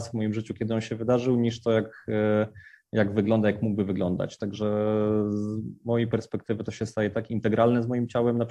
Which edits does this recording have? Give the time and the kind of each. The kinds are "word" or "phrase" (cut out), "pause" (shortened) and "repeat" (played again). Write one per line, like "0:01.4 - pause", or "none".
none